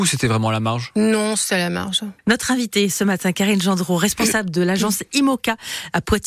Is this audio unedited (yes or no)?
no